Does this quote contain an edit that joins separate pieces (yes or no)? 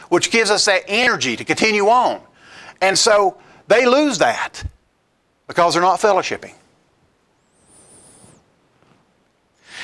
no